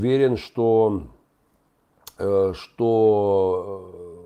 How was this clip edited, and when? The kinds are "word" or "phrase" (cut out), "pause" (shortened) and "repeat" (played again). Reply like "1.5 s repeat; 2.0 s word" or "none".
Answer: none